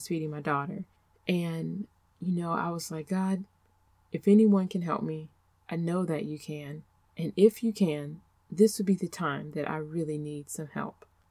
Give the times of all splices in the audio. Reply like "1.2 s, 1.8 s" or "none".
none